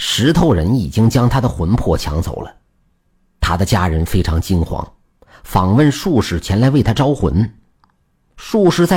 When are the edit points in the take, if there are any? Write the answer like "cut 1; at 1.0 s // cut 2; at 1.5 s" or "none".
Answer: none